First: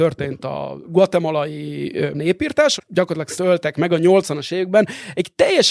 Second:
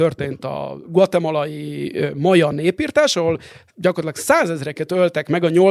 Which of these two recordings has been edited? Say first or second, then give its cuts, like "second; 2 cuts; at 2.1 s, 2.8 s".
first; 3 cuts; at 2.1 s, 2.8 s, 3.4 s